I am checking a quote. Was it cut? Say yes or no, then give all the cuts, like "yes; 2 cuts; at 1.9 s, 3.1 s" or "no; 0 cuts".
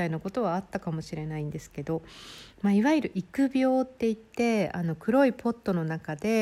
no; 0 cuts